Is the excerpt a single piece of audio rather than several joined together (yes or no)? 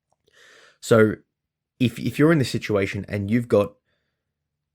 yes